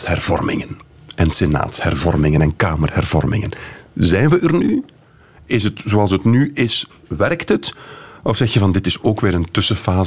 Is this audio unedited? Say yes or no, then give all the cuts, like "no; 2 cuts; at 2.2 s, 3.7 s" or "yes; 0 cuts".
yes; 0 cuts